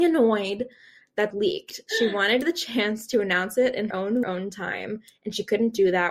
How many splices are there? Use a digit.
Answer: 3